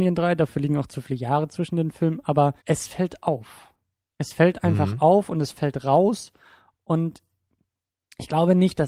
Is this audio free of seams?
no; 1 cut; at 2.6 s

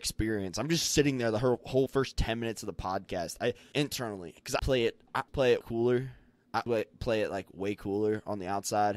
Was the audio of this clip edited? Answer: yes; 6 cuts; at 1.9 s, 3.7 s, 4.6 s, 5.3 s, 5.6 s, 6.7 s

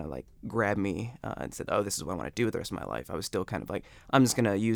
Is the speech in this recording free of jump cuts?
yes; 0 cuts

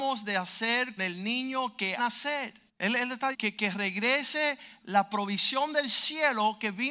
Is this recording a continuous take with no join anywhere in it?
no; 5 cuts; at 1.0 s, 2.0 s, 2.7 s, 3.3 s, 4.8 s

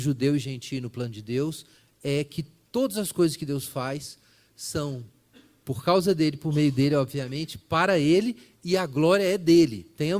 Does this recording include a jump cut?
no; 0 cuts

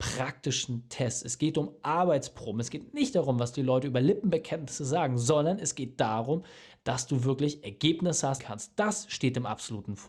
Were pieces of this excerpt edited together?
yes; 1 cut; at 8.4 s

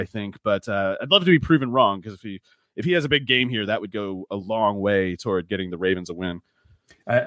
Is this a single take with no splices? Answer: yes; 0 cuts

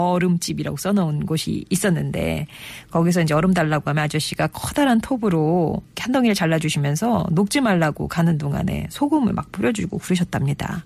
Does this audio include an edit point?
no; 0 cuts

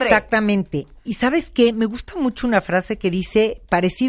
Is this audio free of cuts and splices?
yes; 0 cuts

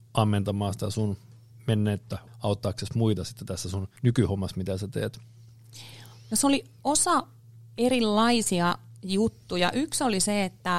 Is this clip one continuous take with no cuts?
no; 2 cuts; at 2.3 s, 4.0 s

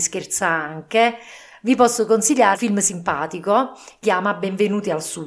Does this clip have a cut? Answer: yes; 2 cuts; at 2.5 s, 4.0 s

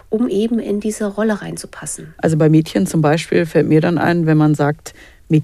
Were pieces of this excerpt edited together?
no; 0 cuts

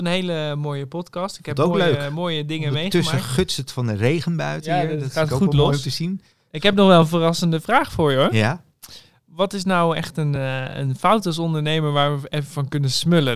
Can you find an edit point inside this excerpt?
no; 0 cuts

